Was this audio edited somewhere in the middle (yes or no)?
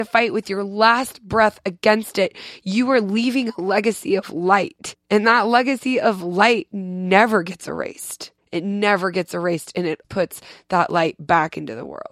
yes